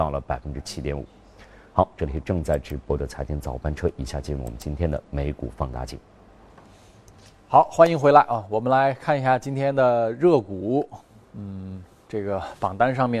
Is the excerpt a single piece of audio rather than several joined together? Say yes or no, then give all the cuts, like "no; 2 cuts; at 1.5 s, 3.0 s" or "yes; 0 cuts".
yes; 0 cuts